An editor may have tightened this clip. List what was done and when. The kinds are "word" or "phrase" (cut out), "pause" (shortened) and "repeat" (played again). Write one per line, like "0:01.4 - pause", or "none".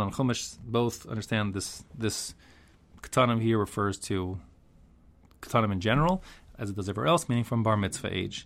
none